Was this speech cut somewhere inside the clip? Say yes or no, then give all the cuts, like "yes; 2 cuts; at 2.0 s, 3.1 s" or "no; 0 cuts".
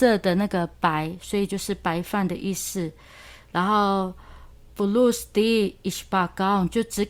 no; 0 cuts